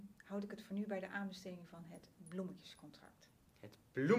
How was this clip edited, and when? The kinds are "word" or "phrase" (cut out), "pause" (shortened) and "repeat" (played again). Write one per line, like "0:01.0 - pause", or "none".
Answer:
none